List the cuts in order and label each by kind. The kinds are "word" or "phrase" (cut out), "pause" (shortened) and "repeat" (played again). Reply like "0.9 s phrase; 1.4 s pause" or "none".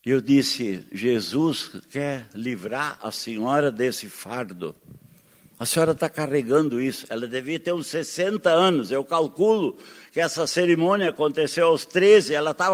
none